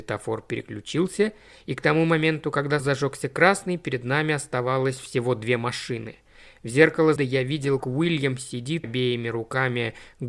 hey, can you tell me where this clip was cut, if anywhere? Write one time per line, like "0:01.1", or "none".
0:02.8
0:07.2
0:07.8
0:08.8